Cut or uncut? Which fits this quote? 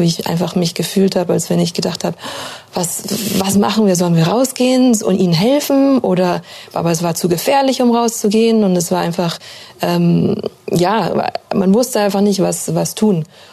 uncut